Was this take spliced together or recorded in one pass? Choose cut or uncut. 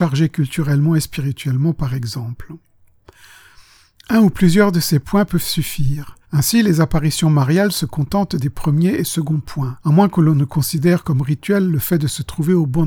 cut